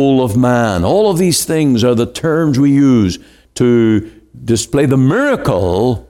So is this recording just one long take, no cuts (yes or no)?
yes